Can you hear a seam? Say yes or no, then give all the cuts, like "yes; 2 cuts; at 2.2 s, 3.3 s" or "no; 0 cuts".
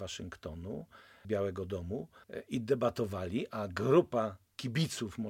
yes; 2 cuts; at 1.2 s, 2.2 s